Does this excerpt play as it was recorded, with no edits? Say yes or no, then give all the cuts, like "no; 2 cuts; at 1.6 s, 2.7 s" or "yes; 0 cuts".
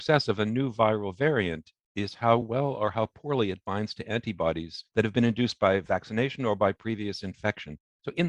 yes; 0 cuts